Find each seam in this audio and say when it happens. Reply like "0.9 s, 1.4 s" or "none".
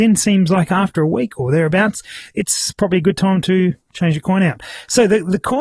none